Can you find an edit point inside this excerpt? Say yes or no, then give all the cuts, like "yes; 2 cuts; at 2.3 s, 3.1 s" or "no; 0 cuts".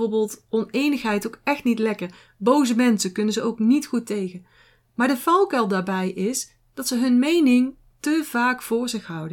no; 0 cuts